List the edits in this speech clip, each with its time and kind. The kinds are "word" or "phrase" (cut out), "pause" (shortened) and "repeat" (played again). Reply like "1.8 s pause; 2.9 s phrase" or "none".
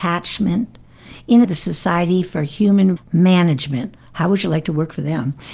1.4 s phrase; 3.0 s word